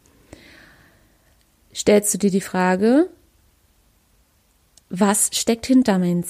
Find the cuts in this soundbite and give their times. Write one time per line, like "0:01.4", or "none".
none